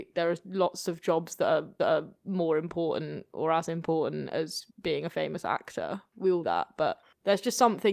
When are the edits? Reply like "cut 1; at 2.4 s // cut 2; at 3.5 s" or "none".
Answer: cut 1; at 1.8 s // cut 2; at 4.7 s // cut 3; at 6.1 s // cut 4; at 6.4 s